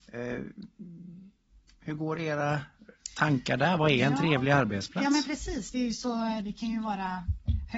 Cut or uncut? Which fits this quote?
uncut